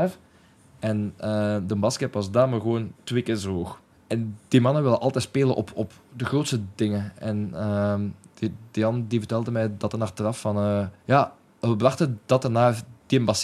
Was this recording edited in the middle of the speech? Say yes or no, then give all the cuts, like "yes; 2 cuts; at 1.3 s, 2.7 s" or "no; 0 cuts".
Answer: yes; 3 cuts; at 2.9 s, 3.9 s, 11.0 s